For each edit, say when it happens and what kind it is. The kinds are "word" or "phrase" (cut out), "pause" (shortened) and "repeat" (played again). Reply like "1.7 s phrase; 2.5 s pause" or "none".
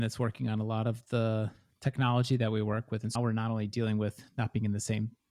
3.2 s word